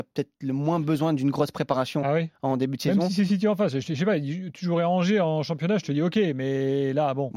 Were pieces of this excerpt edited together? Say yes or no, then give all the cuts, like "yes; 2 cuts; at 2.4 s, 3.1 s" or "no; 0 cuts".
no; 0 cuts